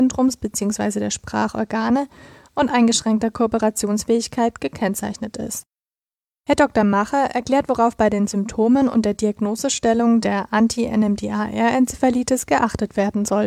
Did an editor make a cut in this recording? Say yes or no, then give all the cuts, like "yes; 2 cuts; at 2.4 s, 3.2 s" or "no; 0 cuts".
no; 0 cuts